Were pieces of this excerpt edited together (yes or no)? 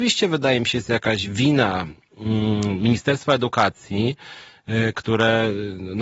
no